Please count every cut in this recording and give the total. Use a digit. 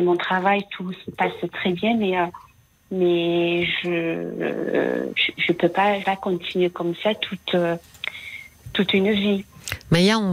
1